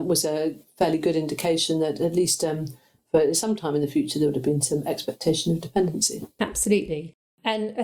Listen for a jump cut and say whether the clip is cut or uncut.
uncut